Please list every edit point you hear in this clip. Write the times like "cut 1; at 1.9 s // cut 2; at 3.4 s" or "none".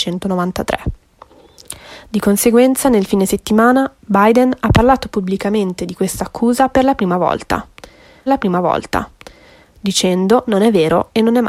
cut 1; at 8.3 s